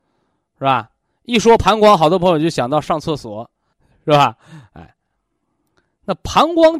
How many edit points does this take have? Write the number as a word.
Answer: zero